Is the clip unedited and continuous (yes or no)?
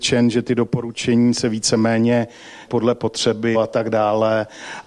no